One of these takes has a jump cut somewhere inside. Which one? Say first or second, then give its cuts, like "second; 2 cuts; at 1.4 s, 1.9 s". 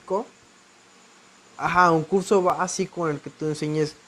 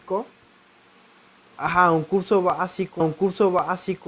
second; 1 cut; at 3.0 s